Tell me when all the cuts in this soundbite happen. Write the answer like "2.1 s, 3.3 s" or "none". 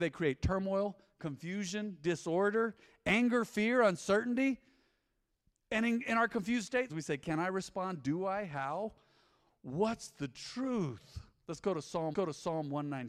6.9 s, 12.1 s